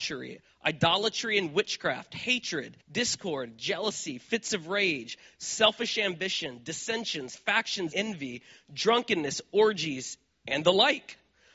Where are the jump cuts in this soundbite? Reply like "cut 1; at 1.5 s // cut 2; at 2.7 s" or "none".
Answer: cut 1; at 2.8 s // cut 2; at 7.9 s